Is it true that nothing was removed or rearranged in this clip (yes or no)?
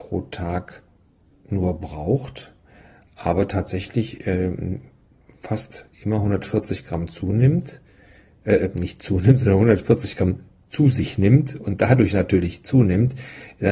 yes